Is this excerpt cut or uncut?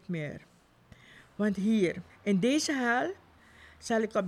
cut